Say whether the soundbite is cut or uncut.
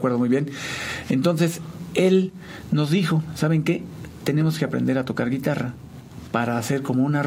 uncut